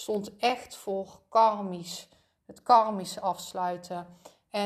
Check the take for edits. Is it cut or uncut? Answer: uncut